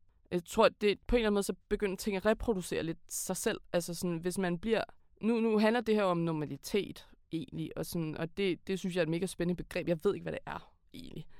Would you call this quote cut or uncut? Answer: cut